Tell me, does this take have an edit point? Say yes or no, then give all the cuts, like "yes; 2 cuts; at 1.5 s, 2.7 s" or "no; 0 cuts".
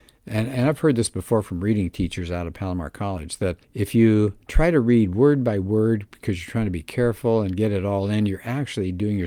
yes; 2 cuts; at 3.6 s, 4.4 s